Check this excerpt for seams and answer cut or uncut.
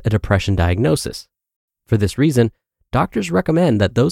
uncut